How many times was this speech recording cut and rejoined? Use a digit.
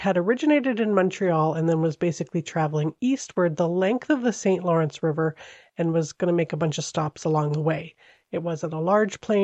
0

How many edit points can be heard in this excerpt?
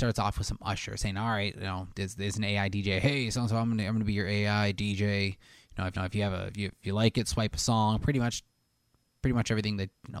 1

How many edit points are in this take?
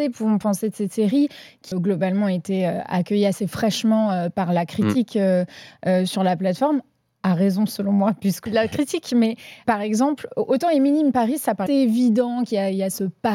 4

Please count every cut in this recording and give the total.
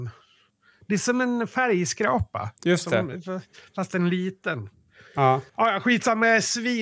1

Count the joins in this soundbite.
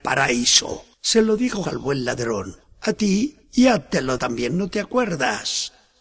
5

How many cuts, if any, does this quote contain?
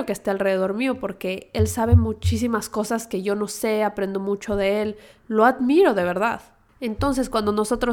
0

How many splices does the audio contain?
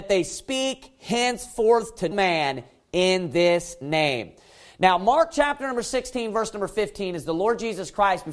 1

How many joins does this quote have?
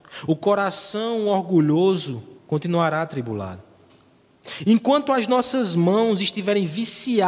1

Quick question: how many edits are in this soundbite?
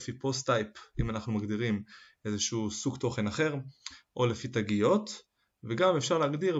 0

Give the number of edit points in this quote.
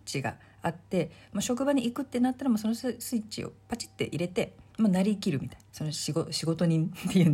2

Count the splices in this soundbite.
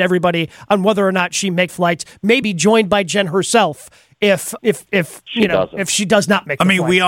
3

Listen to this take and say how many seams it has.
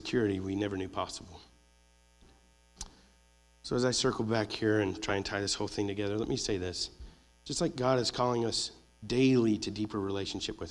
0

